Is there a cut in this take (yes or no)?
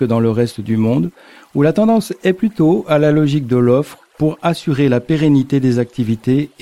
no